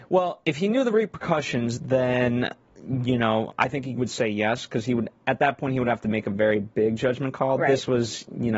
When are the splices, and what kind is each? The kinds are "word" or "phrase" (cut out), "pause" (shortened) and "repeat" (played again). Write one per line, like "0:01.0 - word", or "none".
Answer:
0:03.5 - word